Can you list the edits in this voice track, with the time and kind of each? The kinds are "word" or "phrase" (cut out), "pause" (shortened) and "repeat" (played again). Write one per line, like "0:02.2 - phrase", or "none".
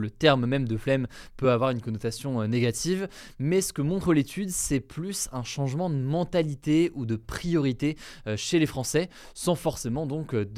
none